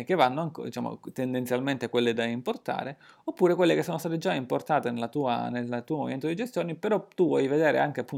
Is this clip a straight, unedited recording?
yes; 0 cuts

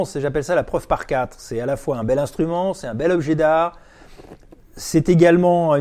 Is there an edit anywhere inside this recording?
no; 0 cuts

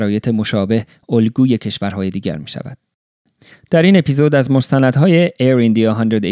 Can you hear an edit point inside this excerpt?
no; 0 cuts

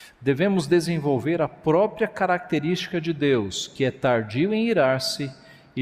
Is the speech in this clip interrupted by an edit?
no; 0 cuts

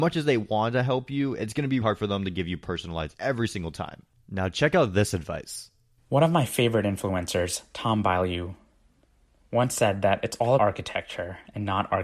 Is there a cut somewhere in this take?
yes; 3 cuts; at 1.8 s, 3.1 s, 10.6 s

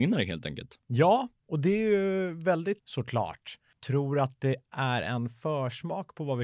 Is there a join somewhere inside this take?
yes; 1 cut; at 2.8 s

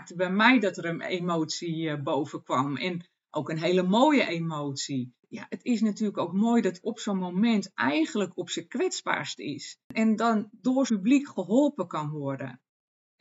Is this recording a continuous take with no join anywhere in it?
no; 4 cuts; at 5.2 s, 6.8 s, 9.8 s, 10.9 s

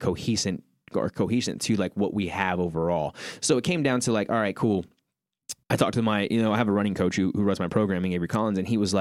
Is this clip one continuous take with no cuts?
no; 1 cut; at 5.6 s

